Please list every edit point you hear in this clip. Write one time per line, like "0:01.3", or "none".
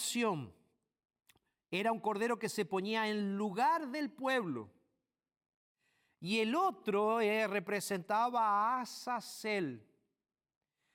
none